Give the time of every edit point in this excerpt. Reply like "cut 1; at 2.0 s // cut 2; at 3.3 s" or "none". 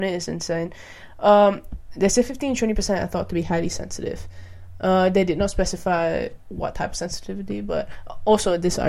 none